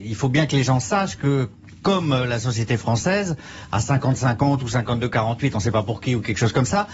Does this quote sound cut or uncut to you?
uncut